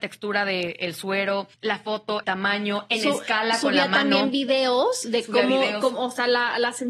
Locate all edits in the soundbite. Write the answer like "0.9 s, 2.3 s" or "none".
1.5 s, 2.2 s